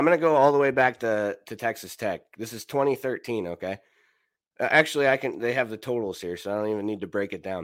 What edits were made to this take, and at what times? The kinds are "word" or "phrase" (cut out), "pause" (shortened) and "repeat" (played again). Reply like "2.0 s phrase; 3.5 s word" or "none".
none